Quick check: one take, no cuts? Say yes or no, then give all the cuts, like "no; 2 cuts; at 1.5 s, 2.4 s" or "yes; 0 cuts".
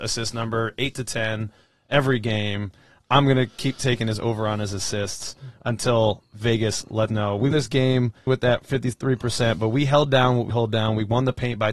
no; 4 cuts; at 7.1 s, 7.5 s, 8.3 s, 10.5 s